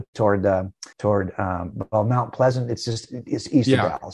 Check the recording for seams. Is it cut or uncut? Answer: cut